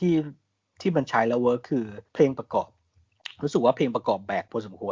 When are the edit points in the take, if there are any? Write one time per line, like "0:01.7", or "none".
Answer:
0:02.1